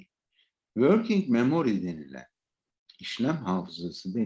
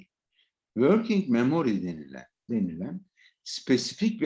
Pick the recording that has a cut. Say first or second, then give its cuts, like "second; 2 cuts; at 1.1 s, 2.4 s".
second; 1 cut; at 2.5 s